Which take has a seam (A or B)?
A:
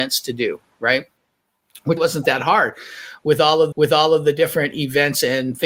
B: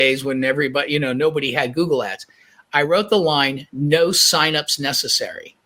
A